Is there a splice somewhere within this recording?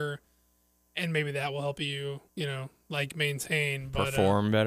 yes; 1 cut; at 2.3 s

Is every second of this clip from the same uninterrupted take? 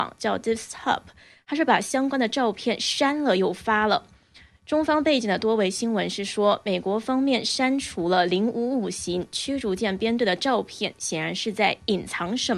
yes; 0 cuts

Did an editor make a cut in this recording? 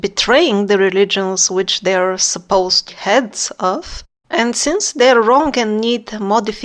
yes; 1 cut; at 2.9 s

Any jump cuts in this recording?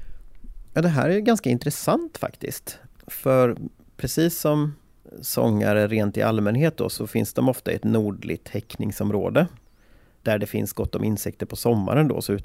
no; 0 cuts

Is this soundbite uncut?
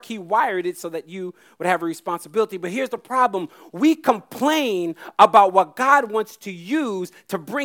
yes; 0 cuts

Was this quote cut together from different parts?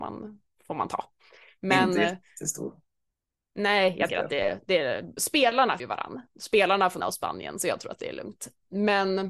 yes; 4 cuts; at 4.1 s, 5.2 s, 5.8 s, 7.0 s

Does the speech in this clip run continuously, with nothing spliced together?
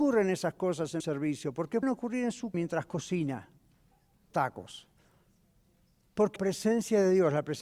no; 5 cuts; at 1.0 s, 1.8 s, 2.5 s, 4.3 s, 6.4 s

